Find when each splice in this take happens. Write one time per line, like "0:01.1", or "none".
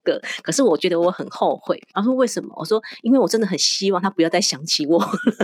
0:01.9